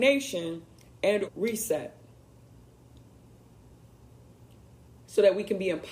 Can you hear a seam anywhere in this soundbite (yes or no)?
yes